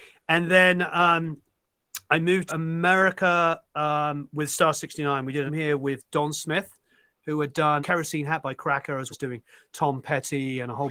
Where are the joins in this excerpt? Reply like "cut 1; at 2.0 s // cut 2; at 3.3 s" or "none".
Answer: cut 1; at 2.5 s // cut 2; at 5.5 s // cut 3; at 7.8 s // cut 4; at 9.1 s